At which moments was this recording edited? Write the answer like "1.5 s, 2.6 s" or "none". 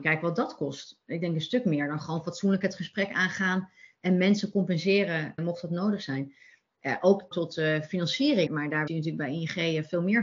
5.4 s, 7.3 s, 8.5 s, 8.9 s